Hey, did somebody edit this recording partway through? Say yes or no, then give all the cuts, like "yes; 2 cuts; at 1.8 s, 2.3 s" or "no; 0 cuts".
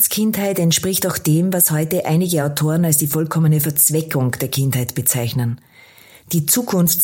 no; 0 cuts